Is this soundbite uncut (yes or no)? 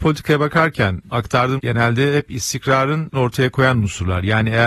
no